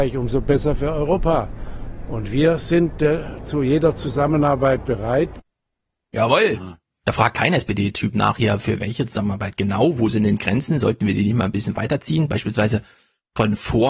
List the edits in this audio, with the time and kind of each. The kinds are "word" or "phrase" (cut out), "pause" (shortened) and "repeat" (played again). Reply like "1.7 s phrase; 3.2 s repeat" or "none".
none